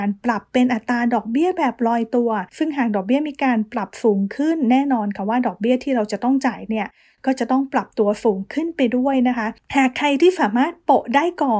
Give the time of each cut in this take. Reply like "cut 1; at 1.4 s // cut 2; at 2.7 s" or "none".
cut 1; at 2.5 s